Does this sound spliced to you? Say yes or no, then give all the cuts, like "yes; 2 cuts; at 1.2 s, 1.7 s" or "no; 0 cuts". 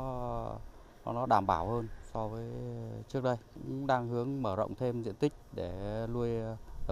no; 0 cuts